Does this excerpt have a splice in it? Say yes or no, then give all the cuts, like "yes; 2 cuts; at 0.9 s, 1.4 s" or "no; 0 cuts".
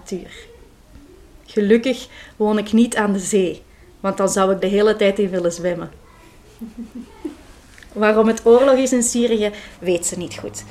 yes; 1 cut; at 4.6 s